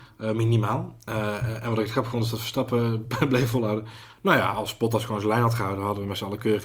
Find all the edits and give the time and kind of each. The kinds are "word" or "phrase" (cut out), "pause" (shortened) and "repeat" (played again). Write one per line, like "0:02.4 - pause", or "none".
none